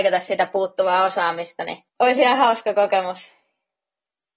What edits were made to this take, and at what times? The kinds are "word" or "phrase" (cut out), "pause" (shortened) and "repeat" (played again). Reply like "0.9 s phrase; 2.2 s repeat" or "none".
1.9 s pause